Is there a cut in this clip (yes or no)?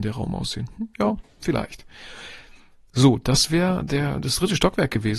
no